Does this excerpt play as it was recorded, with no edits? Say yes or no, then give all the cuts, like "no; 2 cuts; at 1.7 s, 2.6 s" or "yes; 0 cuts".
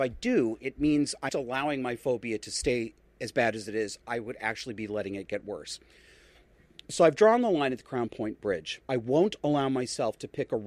no; 2 cuts; at 1.3 s, 8.8 s